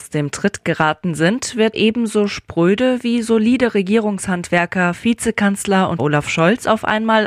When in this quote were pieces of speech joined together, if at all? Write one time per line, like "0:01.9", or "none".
0:01.7
0:06.0

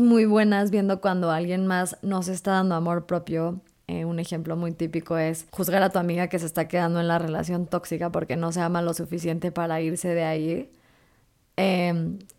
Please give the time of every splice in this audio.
0:05.5

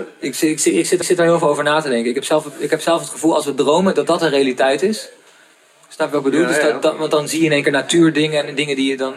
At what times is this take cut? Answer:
0:01.0

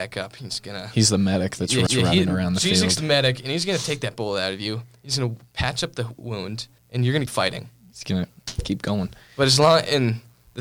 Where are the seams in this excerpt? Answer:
0:01.9
0:06.8
0:07.3

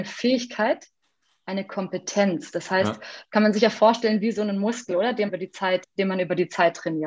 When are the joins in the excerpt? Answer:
0:05.3
0:05.8

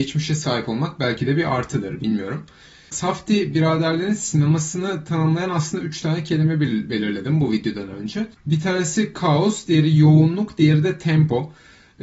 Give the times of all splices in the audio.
none

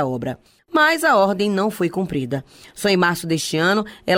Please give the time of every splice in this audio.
none

